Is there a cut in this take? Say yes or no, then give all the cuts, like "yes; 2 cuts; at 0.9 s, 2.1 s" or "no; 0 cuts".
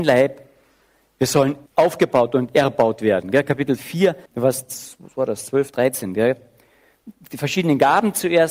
yes; 2 cuts; at 1.7 s, 4.3 s